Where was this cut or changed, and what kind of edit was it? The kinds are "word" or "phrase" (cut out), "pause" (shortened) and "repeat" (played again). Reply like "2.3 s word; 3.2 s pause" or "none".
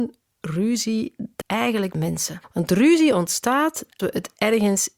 1.4 s word; 1.9 s word; 2.4 s pause; 4.0 s word